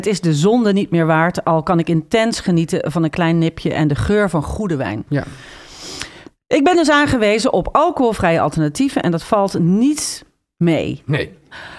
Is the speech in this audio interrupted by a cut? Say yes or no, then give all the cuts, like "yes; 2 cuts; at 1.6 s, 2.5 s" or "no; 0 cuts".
no; 0 cuts